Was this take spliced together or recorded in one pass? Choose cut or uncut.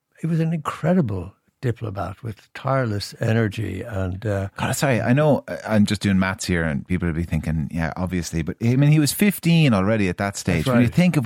uncut